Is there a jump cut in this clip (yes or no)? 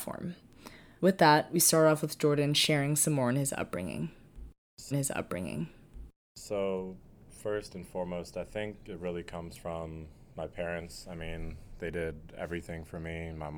yes